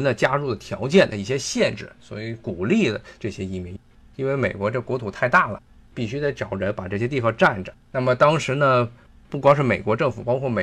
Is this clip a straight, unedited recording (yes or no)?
no